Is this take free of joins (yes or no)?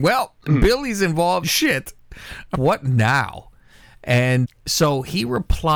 no